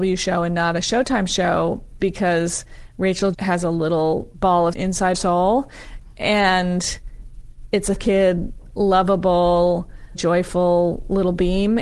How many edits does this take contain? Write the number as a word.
seven